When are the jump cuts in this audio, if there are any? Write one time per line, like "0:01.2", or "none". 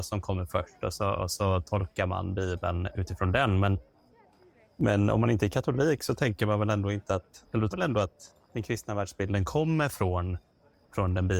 0:07.7
0:08.4